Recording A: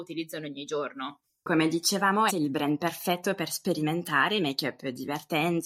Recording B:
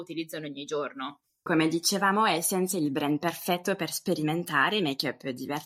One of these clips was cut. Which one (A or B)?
A